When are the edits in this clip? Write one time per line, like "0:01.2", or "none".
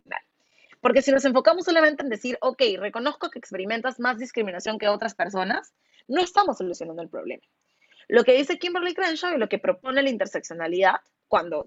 none

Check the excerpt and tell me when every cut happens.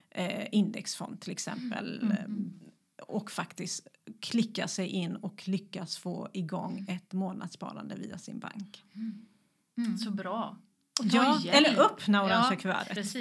none

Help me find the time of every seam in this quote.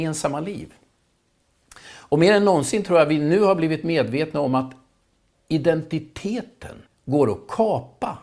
0:06.9

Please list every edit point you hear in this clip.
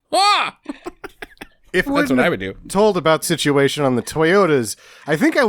0:01.9
0:02.7
0:03.2

